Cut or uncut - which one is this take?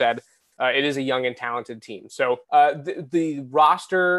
cut